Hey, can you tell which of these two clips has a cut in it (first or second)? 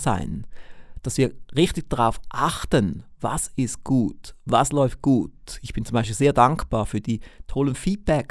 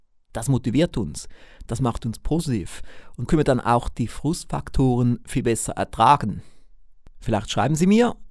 second